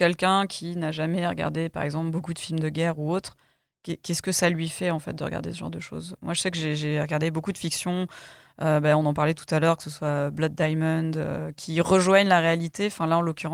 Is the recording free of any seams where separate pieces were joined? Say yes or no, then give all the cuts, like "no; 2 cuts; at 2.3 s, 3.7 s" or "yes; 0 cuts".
yes; 0 cuts